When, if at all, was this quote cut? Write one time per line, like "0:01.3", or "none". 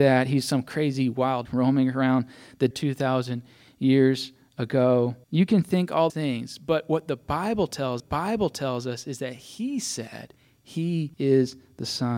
0:01.5
0:02.7
0:05.2
0:06.1
0:08.0
0:11.1